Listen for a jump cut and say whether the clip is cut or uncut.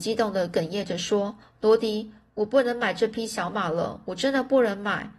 cut